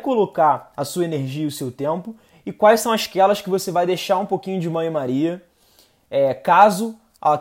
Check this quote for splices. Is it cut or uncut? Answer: uncut